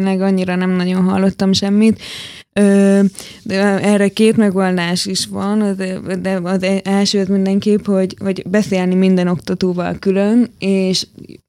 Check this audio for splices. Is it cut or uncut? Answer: uncut